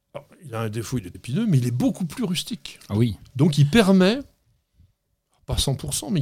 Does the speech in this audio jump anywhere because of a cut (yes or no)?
yes